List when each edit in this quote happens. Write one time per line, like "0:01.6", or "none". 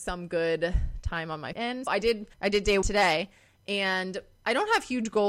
0:01.5
0:01.9
0:02.3
0:02.8